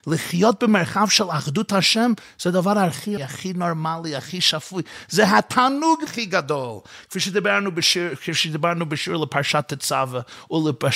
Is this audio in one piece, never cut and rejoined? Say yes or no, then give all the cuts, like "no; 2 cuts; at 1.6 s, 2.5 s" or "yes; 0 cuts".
no; 2 cuts; at 3.2 s, 6.1 s